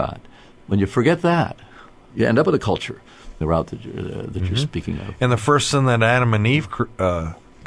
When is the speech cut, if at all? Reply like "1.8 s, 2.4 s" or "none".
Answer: 2.1 s, 3.4 s